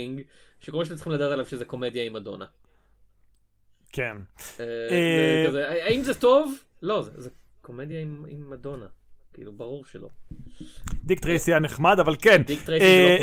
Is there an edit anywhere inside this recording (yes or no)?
no